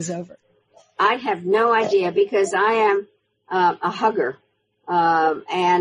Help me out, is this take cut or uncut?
uncut